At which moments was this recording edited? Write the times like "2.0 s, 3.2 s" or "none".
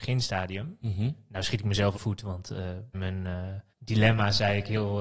2.0 s, 2.9 s, 3.7 s